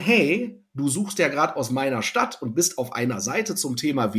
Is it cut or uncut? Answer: uncut